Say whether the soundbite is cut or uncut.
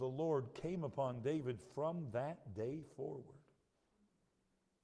uncut